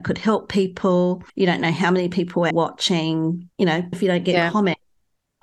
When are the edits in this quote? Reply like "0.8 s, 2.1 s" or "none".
1.3 s, 2.5 s, 3.5 s, 3.9 s